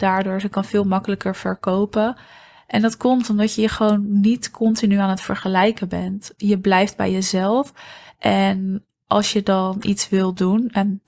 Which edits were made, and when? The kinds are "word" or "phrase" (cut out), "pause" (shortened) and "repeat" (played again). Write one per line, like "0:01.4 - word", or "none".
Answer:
none

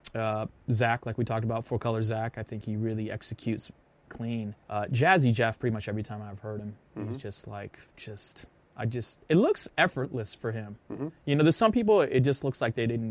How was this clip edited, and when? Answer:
0:04.1 - word
0:04.6 - pause
0:08.6 - pause

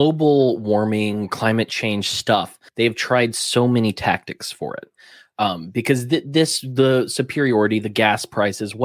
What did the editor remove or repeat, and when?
0:02.7 - pause

